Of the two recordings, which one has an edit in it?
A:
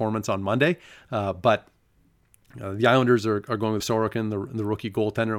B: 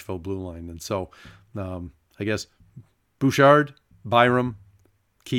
A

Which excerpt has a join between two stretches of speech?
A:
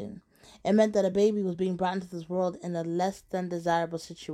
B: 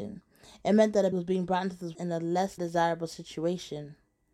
B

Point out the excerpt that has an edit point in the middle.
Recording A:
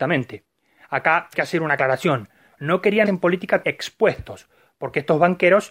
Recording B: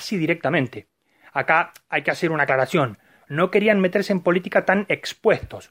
A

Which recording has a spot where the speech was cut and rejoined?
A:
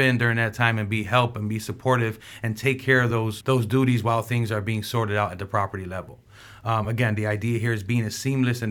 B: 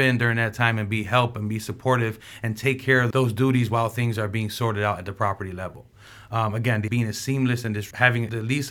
B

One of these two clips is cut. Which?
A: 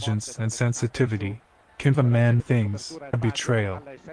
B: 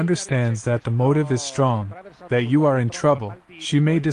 A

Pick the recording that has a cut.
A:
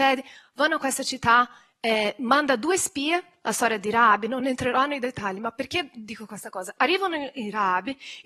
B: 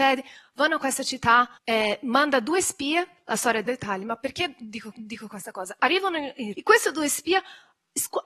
B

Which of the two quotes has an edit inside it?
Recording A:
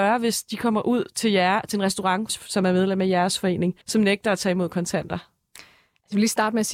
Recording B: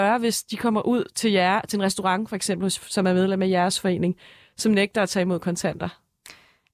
A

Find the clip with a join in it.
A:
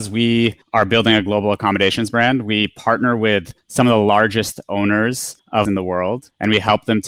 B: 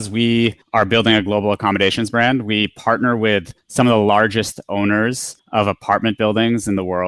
A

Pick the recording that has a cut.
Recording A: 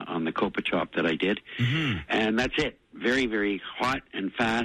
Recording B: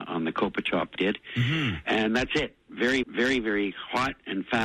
B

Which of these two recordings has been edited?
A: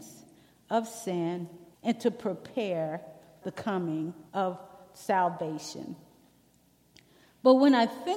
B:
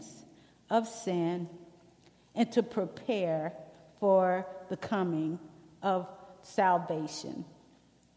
A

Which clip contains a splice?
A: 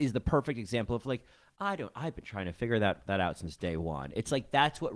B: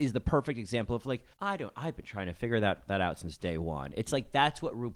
B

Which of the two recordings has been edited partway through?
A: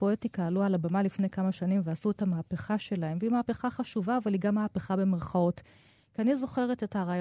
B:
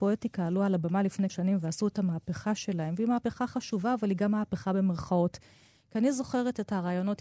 B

